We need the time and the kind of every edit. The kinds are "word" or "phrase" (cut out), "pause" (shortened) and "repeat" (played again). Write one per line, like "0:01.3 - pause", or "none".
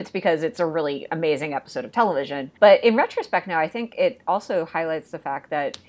0:02.6 - pause